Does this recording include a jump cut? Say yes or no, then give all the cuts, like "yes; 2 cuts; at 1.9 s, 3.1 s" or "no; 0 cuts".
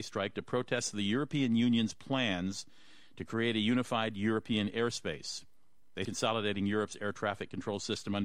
yes; 1 cut; at 6.0 s